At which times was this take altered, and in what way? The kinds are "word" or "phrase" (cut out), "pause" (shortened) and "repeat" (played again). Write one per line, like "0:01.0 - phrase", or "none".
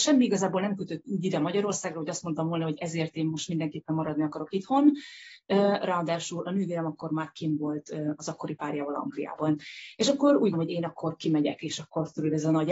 0:10.5 - word

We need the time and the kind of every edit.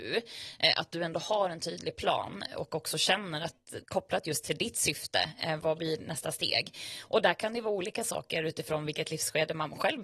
0:03.8 - pause

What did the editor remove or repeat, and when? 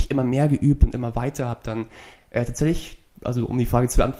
none

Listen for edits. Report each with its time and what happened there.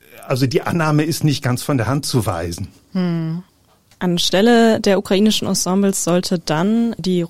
none

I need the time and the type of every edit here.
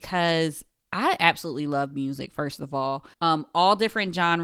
0:03.1 - pause

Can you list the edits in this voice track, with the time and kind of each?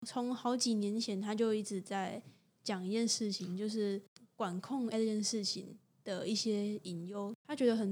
0:04.9 - word

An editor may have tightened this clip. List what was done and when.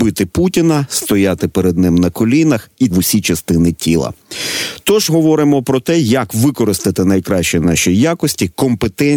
0:02.9 - phrase
0:05.1 - word

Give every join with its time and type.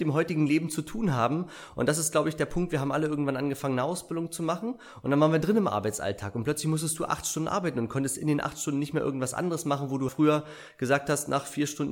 0:10.1 - word

